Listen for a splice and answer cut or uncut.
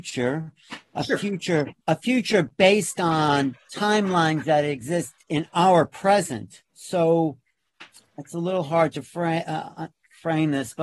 cut